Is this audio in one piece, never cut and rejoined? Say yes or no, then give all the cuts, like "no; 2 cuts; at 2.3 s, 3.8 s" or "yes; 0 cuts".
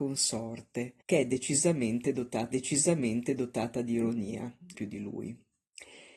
no; 3 cuts; at 1.0 s, 2.5 s, 4.7 s